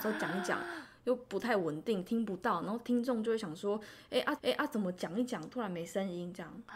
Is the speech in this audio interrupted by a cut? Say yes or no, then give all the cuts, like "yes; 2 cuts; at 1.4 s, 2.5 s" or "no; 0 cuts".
yes; 1 cut; at 4.4 s